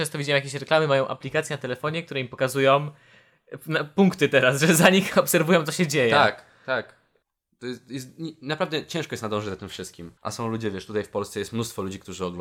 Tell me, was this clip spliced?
yes; 2 cuts; at 7.2 s, 10.2 s

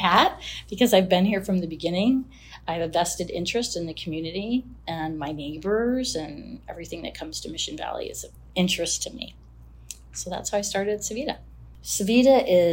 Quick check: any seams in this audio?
no; 0 cuts

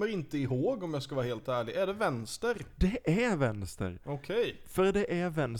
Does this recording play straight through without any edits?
yes; 0 cuts

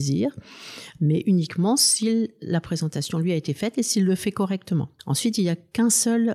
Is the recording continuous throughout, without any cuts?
no; 1 cut; at 5.0 s

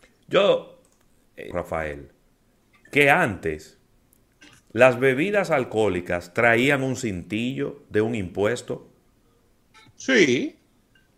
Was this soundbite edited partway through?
yes; 1 cut; at 1.5 s

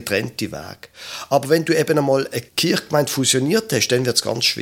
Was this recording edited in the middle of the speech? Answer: yes; 1 cut; at 2.5 s

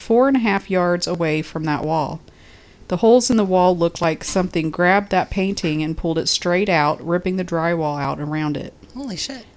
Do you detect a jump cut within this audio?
no; 0 cuts

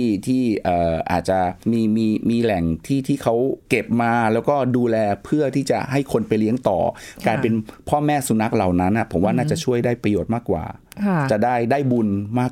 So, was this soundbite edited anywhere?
yes; 1 cut; at 1.6 s

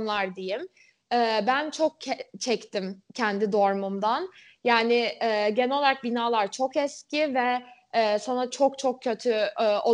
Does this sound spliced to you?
no; 0 cuts

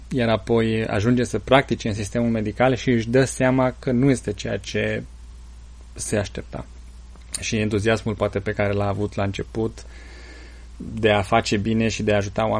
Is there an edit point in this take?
no; 0 cuts

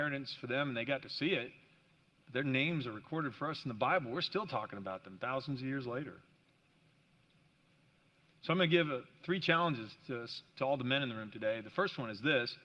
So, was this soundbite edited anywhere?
no; 0 cuts

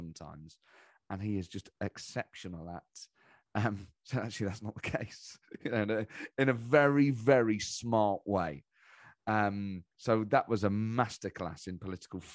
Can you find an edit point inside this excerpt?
yes; 1 cut; at 9.9 s

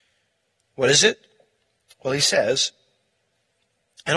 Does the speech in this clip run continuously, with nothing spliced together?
yes; 0 cuts

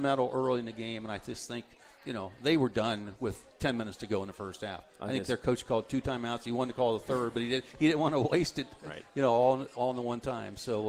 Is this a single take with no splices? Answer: yes; 0 cuts

